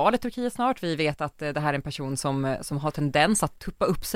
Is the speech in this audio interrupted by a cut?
no; 0 cuts

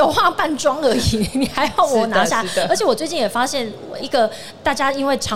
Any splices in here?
yes; 1 cut; at 4.0 s

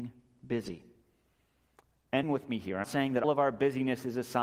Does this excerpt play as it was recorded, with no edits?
no; 3 cuts; at 2.2 s, 2.8 s, 3.2 s

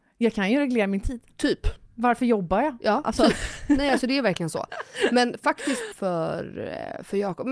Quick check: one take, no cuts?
no; 1 cut; at 5.9 s

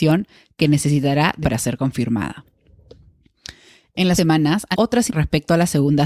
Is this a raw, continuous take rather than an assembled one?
no; 4 cuts; at 1.4 s, 4.2 s, 4.7 s, 5.1 s

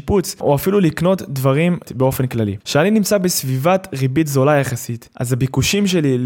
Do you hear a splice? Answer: yes; 2 cuts; at 1.8 s, 5.1 s

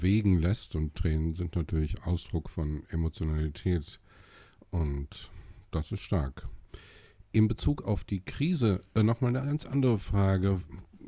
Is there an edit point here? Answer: no; 0 cuts

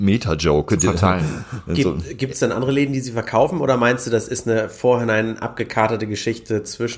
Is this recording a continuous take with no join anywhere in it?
yes; 0 cuts

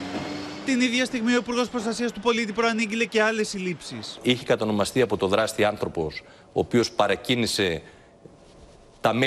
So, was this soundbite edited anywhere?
no; 0 cuts

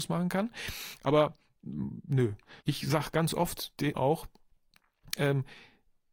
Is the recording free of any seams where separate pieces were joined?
no; 2 cuts; at 2.6 s, 3.9 s

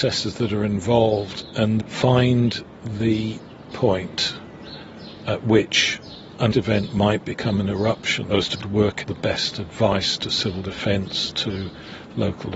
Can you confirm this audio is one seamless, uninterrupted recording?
no; 6 cuts; at 1.8 s, 3.7 s, 6.5 s, 8.3 s, 8.6 s, 9.0 s

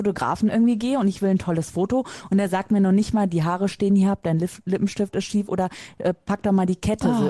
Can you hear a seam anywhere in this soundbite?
no; 0 cuts

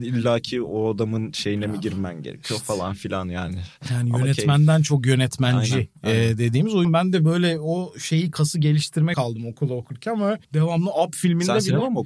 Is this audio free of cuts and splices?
no; 3 cuts; at 6.8 s, 9.1 s, 10.4 s

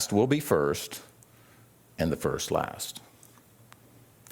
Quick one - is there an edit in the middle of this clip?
no; 0 cuts

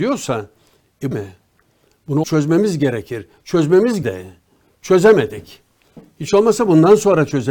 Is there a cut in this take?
yes; 3 cuts; at 1.1 s, 2.2 s, 4.0 s

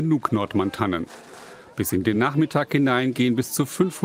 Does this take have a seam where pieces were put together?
no; 0 cuts

